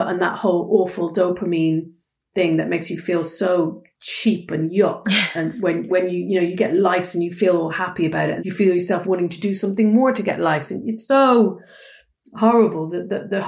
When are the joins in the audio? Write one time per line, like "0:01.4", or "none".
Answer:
0:05.9
0:08.4
0:09.0
0:11.1